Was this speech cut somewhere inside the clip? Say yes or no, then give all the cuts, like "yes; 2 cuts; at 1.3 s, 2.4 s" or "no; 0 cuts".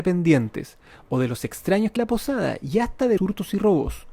yes; 2 cuts; at 2.0 s, 3.2 s